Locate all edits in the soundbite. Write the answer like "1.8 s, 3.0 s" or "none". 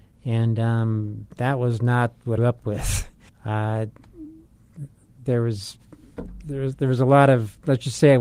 2.4 s, 3.3 s